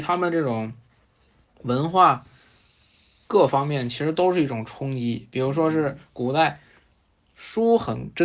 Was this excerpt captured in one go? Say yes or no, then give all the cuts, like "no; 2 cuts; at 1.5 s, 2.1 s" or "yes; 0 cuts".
yes; 0 cuts